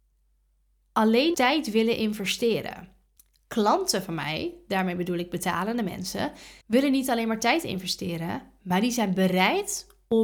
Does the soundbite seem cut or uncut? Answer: cut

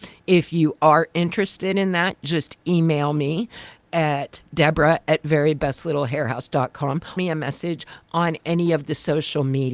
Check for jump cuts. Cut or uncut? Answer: cut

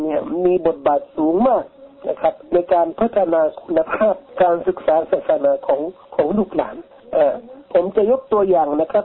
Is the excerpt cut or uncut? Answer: cut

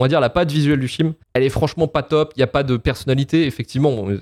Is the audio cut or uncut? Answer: cut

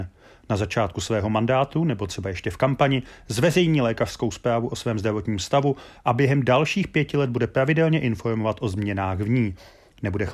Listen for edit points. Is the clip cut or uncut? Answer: uncut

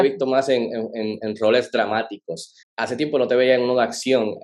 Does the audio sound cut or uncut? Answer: cut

